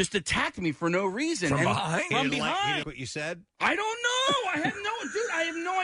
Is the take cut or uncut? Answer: cut